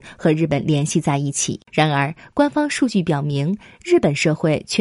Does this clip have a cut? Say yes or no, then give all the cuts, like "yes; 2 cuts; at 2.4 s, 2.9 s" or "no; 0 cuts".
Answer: yes; 1 cut; at 1.6 s